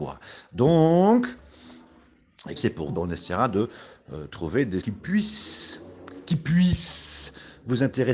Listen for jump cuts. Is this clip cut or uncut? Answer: cut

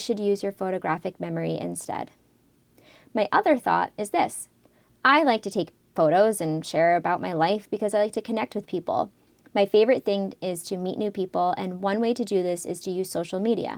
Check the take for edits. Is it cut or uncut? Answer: uncut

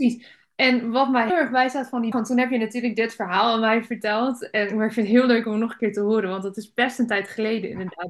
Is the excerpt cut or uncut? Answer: cut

